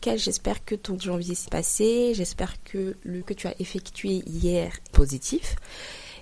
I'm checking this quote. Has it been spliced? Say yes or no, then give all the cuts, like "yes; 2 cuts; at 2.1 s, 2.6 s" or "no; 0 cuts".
yes; 4 cuts; at 1.0 s, 1.5 s, 3.2 s, 4.9 s